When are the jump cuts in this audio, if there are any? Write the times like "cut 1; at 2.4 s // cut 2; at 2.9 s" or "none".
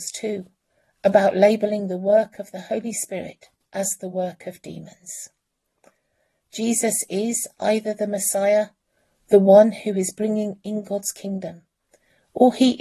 none

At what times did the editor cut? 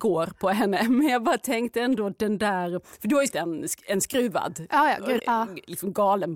cut 1; at 3.3 s // cut 2; at 5.2 s

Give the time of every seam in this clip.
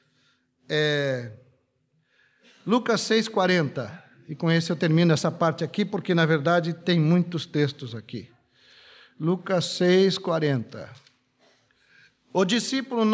none

